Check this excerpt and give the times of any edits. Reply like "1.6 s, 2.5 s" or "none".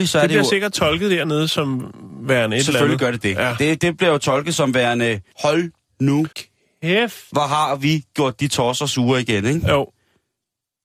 5.3 s, 6.3 s

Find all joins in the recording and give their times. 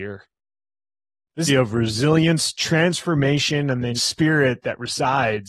1.5 s, 4.0 s

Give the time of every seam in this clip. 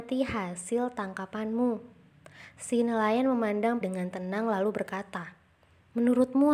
3.8 s

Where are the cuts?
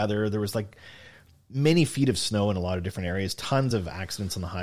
none

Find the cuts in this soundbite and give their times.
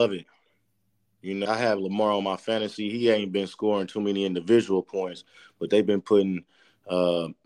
1.5 s

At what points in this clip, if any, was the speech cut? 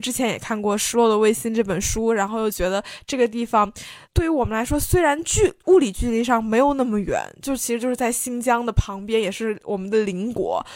4.0 s, 5.6 s

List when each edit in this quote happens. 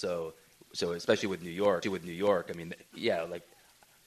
1.8 s, 2.9 s

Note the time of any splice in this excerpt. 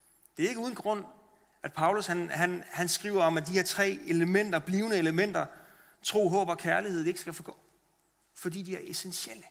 none

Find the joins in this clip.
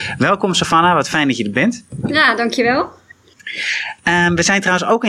none

